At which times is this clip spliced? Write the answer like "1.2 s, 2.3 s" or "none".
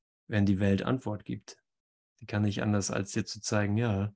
none